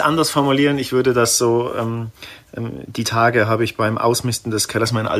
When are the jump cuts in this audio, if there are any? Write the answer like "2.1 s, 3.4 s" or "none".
none